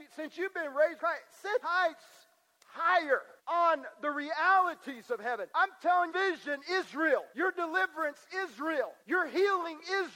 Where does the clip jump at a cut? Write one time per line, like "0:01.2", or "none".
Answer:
0:01.0
0:01.6
0:03.4
0:05.5
0:06.1
0:07.3
0:09.0